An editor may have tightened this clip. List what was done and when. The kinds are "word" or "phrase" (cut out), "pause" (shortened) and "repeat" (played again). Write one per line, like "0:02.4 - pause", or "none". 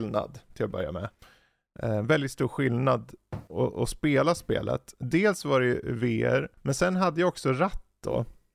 0:06.5 - pause